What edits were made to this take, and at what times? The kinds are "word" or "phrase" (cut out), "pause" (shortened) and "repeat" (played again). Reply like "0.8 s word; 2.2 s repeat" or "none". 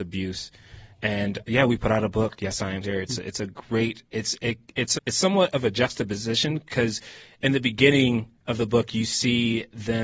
1.4 s word; 2.8 s word; 5.0 s word